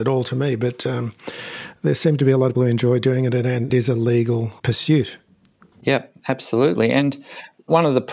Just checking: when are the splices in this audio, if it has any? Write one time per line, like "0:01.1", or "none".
0:02.5
0:03.7
0:06.2

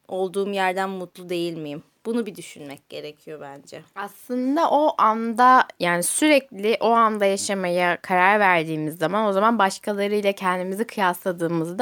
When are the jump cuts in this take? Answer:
none

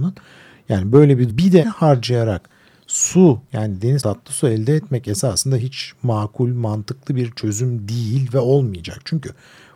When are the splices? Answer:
0:01.3
0:01.6
0:03.5
0:04.0

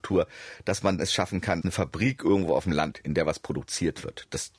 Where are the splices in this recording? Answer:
0:01.0
0:01.6
0:02.9

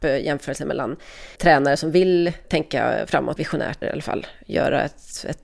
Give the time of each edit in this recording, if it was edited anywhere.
0:01.4
0:02.4
0:03.4
0:03.8

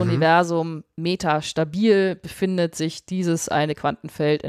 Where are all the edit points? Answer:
none

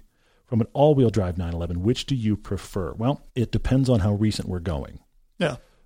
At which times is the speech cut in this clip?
0:03.3

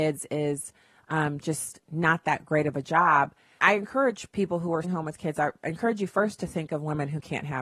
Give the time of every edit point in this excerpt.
0:03.6
0:04.8

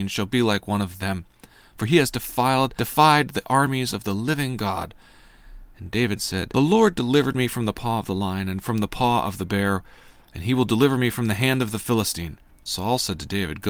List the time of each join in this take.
none

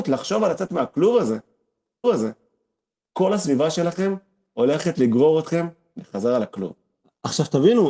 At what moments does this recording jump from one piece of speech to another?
0:02.0

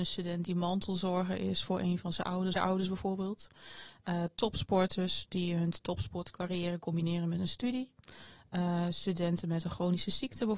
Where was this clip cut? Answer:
0:02.5

